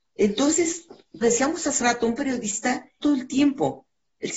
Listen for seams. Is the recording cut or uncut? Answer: cut